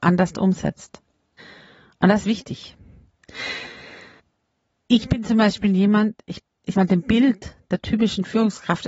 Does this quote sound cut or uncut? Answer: cut